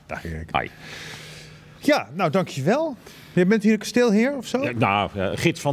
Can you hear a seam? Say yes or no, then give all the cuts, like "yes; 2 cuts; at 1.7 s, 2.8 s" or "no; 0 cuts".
no; 0 cuts